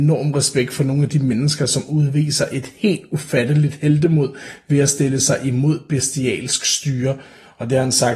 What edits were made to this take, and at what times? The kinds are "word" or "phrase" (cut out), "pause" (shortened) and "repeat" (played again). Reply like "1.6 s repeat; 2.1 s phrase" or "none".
none